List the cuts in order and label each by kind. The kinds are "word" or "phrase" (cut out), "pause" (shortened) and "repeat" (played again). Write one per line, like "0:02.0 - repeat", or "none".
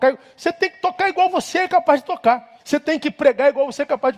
0:02.6 - pause